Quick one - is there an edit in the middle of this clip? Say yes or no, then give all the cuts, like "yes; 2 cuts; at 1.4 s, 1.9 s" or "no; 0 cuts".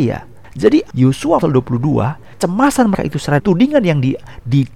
yes; 3 cuts; at 1.4 s, 2.9 s, 3.4 s